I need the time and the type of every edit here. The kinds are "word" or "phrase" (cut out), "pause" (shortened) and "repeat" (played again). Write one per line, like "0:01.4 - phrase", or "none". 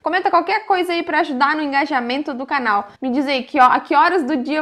0:03.0 - pause